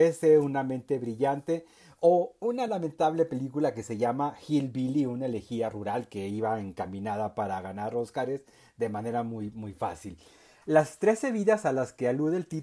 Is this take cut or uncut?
uncut